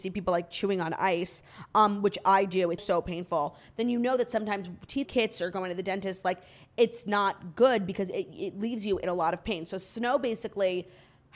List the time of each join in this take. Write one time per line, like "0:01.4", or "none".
0:02.8
0:05.1